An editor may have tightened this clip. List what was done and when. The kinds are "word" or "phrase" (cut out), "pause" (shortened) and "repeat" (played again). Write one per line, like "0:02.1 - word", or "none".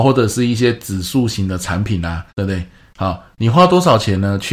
0:02.3 - pause